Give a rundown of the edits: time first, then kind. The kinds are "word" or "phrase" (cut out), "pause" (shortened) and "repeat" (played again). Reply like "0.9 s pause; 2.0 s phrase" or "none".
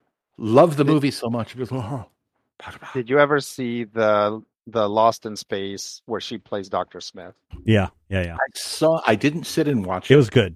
none